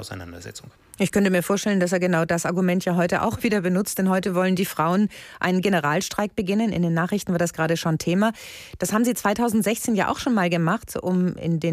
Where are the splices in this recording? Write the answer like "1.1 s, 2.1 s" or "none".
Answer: none